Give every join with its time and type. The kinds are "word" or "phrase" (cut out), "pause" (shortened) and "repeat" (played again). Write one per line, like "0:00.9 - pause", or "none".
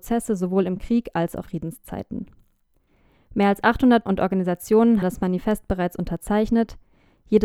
0:01.4 - word
0:04.1 - word
0:05.0 - word

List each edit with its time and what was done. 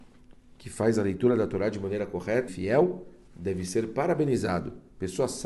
0:02.5 - word

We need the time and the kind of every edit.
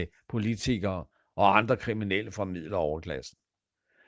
none

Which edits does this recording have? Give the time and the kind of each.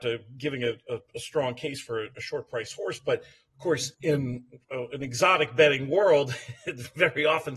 0:03.9 - pause

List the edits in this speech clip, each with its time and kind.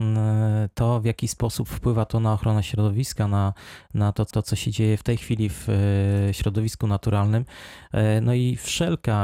0:04.3 - repeat

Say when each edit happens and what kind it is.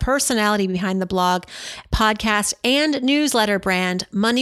none

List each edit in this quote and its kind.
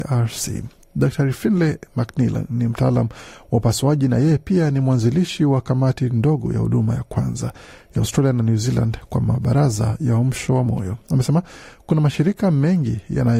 none

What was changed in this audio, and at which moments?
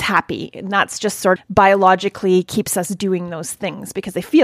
0:01.4 - word

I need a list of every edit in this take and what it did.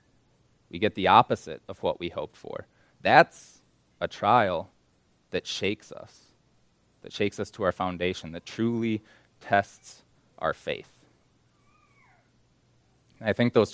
none

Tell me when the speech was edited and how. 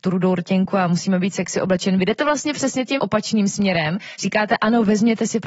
0:03.0 - word

